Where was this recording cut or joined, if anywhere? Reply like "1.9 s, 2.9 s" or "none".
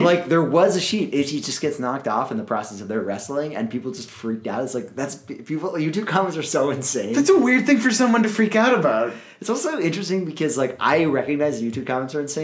none